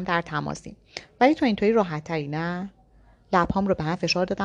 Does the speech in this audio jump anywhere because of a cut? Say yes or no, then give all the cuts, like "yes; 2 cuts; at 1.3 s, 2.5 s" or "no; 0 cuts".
no; 0 cuts